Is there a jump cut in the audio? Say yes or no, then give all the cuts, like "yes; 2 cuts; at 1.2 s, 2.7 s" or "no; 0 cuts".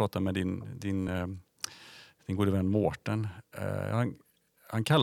no; 0 cuts